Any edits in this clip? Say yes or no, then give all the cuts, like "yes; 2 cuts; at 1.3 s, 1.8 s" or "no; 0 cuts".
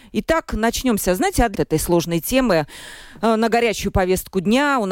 yes; 1 cut; at 1.5 s